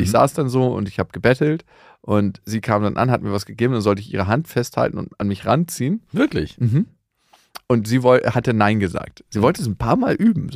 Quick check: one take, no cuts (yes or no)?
yes